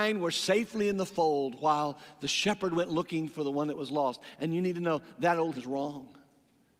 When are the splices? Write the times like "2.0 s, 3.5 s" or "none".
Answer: 5.6 s